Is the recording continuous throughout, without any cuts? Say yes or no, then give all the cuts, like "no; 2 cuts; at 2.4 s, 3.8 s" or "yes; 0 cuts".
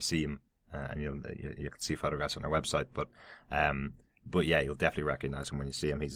yes; 0 cuts